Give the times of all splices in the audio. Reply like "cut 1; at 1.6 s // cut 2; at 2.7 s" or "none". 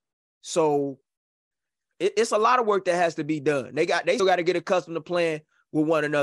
cut 1; at 4.2 s